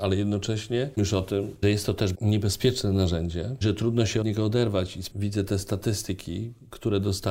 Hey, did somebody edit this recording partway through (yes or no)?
yes